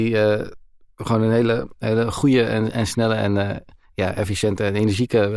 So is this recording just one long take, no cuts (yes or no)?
yes